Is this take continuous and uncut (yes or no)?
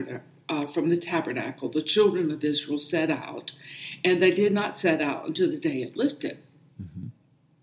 yes